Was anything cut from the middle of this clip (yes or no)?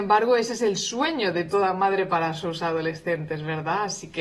no